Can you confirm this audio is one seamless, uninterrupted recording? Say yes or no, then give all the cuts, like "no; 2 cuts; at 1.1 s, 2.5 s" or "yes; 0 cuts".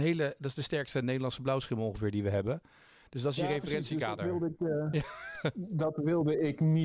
yes; 0 cuts